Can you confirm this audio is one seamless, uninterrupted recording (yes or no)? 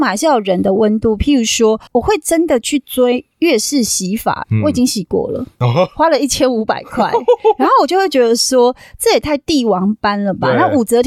no